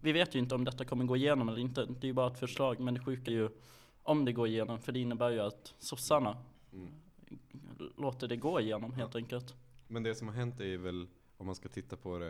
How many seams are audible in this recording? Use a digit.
1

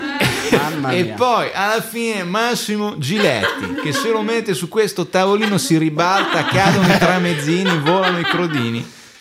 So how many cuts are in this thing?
0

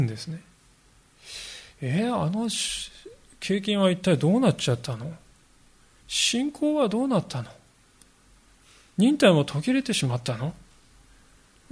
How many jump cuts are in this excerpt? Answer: 0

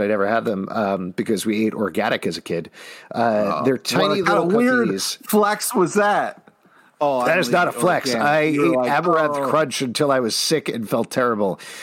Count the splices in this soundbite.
0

